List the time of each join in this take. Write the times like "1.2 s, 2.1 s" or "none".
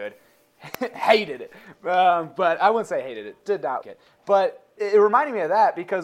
3.4 s, 3.8 s, 4.8 s